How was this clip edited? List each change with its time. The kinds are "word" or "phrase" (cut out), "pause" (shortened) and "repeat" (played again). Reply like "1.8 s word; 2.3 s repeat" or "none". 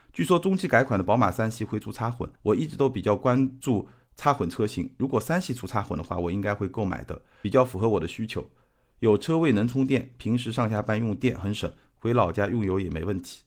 2.4 s pause